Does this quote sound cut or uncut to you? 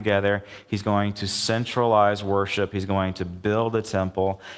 uncut